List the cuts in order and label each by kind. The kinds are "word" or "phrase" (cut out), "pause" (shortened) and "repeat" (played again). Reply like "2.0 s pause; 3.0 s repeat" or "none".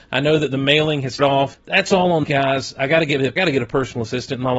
1.2 s word; 1.5 s word; 2.2 s word; 3.4 s word